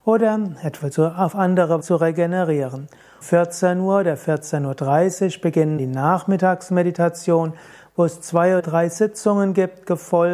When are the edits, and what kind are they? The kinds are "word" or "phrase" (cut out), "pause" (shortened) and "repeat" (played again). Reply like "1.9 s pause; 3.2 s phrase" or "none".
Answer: 0.9 s word; 1.8 s word; 3.2 s word; 5.8 s word; 8.6 s word